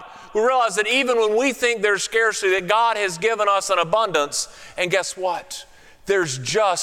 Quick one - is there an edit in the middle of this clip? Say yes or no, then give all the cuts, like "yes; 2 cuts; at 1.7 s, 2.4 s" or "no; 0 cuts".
no; 0 cuts